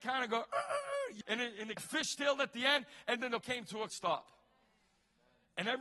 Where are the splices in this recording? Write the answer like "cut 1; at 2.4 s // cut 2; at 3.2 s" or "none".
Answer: cut 1; at 1.2 s // cut 2; at 1.8 s // cut 3; at 3.4 s // cut 4; at 3.9 s